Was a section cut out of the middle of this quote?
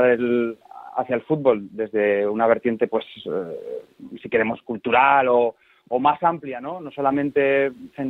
no; 0 cuts

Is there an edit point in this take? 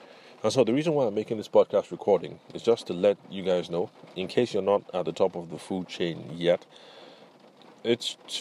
no; 0 cuts

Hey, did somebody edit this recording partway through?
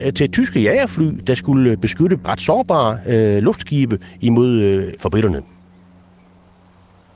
yes; 2 cuts; at 2.2 s, 5.0 s

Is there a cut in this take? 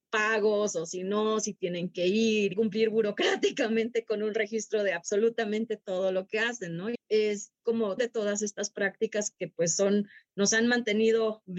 yes; 3 cuts; at 2.5 s, 6.9 s, 8.0 s

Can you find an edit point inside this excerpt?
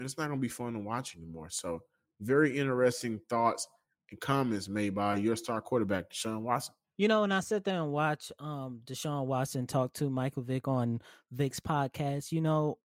no; 0 cuts

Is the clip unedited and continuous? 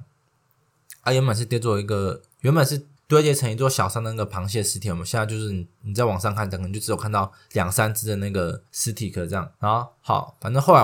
no; 4 cuts; at 2.3 s, 3.0 s, 8.7 s, 9.6 s

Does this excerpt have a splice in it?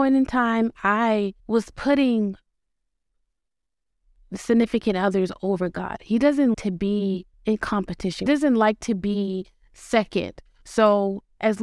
yes; 4 cuts; at 1.4 s, 6.5 s, 7.3 s, 8.3 s

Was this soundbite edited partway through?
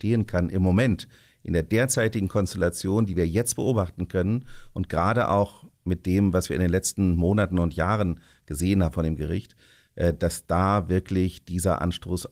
no; 0 cuts

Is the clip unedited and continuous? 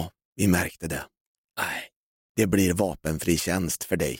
yes; 0 cuts

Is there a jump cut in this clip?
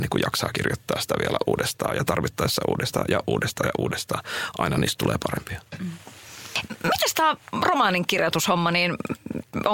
no; 0 cuts

